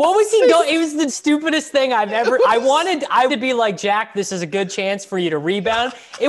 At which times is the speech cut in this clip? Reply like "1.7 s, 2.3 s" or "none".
1.1 s, 3.3 s